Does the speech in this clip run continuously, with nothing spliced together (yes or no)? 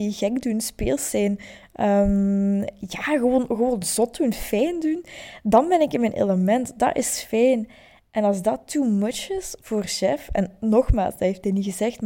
yes